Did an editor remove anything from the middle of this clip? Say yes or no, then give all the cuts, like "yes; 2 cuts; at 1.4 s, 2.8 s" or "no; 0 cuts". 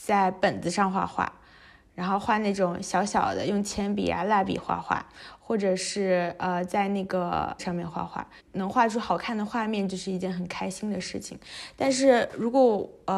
yes; 1 cut; at 7.6 s